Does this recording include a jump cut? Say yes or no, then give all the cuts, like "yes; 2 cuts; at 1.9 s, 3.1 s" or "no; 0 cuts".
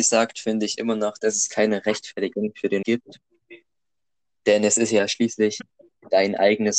yes; 1 cut; at 2.8 s